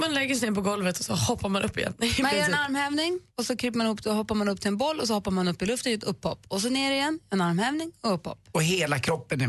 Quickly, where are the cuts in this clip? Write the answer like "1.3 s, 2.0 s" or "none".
3.3 s